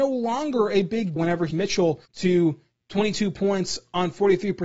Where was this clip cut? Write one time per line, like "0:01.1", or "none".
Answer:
0:01.2
0:01.5
0:02.1